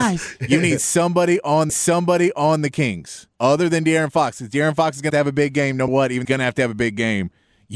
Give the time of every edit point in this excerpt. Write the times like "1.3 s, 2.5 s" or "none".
1.7 s, 3.3 s, 5.1 s, 5.9 s, 6.2 s